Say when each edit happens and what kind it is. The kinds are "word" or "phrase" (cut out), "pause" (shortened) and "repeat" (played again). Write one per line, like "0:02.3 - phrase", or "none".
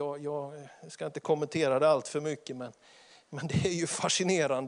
none